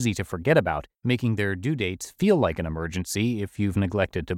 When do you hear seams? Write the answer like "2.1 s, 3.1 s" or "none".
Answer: 1.0 s